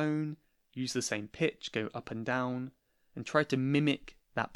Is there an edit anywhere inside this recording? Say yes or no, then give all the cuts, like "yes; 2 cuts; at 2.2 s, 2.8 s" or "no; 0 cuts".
no; 0 cuts